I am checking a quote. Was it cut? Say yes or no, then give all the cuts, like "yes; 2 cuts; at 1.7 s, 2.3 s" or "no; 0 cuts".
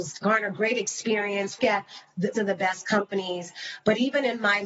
yes; 2 cuts; at 1.6 s, 2.3 s